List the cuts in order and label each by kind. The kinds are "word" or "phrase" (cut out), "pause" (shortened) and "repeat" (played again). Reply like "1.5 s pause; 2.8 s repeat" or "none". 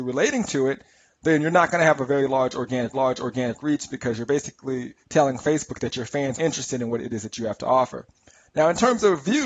2.9 s repeat; 5.0 s pause; 6.4 s word